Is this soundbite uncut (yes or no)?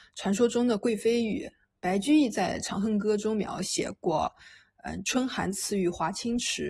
yes